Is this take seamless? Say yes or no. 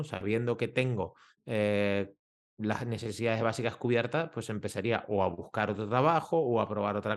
yes